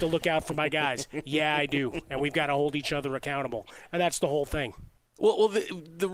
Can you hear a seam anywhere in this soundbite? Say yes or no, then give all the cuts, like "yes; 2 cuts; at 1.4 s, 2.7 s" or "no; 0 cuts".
no; 0 cuts